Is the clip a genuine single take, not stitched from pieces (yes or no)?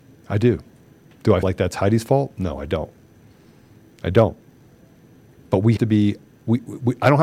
no